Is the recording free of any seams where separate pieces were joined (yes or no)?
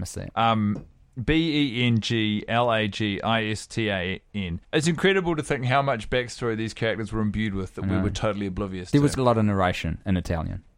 no